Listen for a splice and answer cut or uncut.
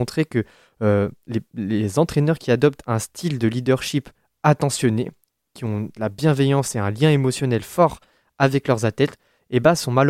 uncut